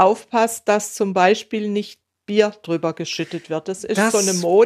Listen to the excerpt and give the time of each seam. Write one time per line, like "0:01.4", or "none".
none